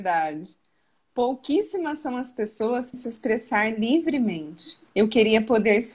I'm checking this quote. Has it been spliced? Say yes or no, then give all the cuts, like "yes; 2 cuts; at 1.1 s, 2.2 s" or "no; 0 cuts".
yes; 2 cuts; at 2.9 s, 4.9 s